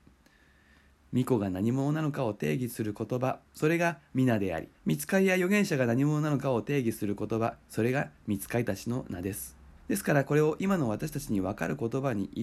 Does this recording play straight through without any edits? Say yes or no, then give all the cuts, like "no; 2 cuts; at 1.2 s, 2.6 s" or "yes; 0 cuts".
no; 4 cuts; at 3.5 s, 4.7 s, 7.6 s, 9.8 s